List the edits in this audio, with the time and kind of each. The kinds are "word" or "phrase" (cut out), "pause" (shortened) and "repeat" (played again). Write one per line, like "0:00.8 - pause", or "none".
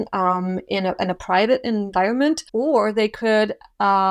0:02.5 - pause